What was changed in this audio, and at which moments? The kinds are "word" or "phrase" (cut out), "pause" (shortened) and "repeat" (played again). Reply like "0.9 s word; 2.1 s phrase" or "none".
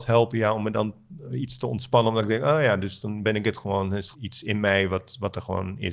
4.1 s word